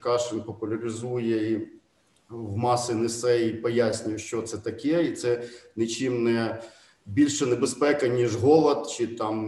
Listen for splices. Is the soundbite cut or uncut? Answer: uncut